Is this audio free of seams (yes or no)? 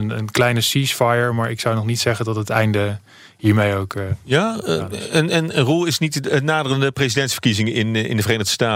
yes